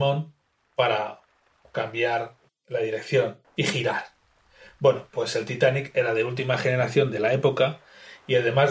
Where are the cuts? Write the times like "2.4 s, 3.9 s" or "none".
2.5 s, 3.6 s